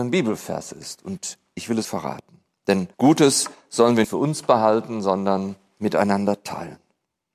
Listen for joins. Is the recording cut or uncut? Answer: cut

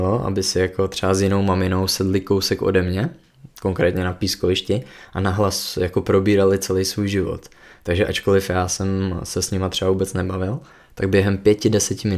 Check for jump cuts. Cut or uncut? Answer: uncut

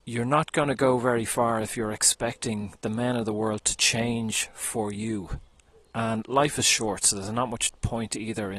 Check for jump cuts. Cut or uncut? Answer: uncut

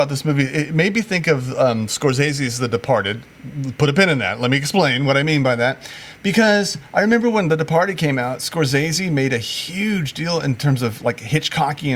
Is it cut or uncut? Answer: uncut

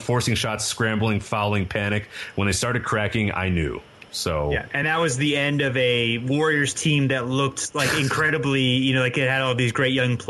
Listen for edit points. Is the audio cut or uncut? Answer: uncut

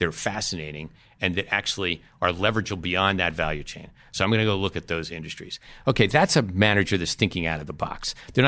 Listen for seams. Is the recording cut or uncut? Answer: uncut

